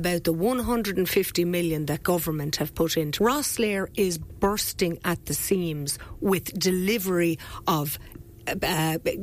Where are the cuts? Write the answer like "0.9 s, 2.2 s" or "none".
3.2 s